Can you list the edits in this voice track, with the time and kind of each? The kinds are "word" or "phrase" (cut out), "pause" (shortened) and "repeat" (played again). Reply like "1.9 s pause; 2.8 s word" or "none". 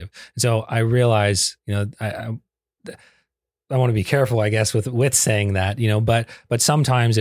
none